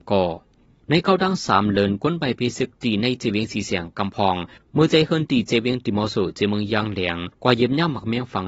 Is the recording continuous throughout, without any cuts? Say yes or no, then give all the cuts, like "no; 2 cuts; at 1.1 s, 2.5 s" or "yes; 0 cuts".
no; 1 cut; at 7.3 s